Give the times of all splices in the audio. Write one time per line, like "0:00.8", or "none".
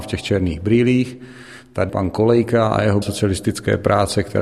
0:01.9
0:03.0